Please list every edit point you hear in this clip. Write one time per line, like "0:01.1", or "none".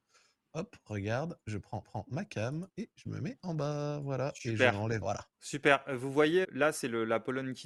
0:01.8
0:02.7
0:05.0
0:05.3
0:06.4

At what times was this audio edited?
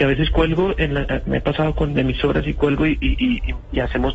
none

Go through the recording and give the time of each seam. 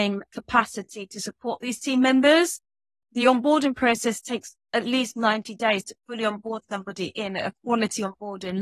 none

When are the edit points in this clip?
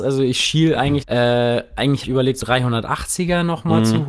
0:01.0
0:02.0
0:02.4

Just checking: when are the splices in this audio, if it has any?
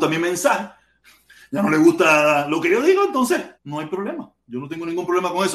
0:03.5

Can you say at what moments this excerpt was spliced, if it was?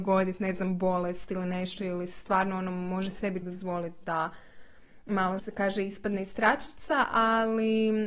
0:03.4
0:05.4

